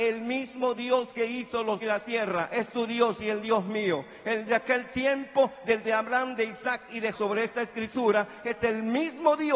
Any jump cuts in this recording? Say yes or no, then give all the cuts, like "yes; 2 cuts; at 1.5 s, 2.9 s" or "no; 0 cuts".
yes; 4 cuts; at 1.8 s, 4.5 s, 5.8 s, 7.1 s